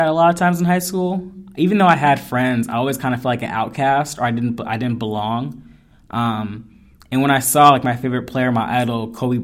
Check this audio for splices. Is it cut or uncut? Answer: uncut